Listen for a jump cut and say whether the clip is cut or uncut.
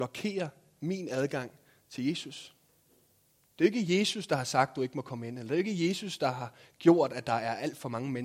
uncut